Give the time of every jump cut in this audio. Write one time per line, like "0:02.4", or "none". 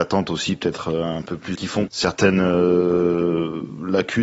0:01.5
0:01.9